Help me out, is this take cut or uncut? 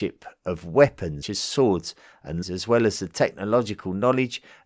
cut